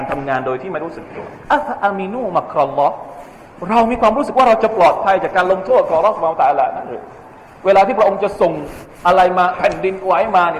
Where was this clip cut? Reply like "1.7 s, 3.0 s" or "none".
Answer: 1.4 s